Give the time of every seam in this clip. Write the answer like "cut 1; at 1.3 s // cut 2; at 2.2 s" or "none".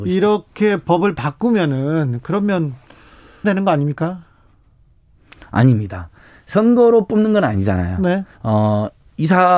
cut 1; at 3.4 s // cut 2; at 8.3 s